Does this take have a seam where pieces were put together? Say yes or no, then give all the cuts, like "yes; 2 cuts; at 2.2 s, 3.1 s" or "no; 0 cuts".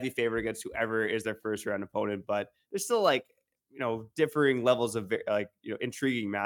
no; 0 cuts